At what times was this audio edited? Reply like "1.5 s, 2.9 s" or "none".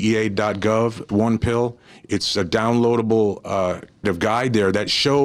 1.1 s, 4.0 s